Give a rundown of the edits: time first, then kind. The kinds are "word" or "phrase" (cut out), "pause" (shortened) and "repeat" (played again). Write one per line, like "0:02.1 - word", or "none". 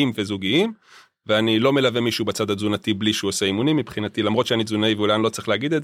none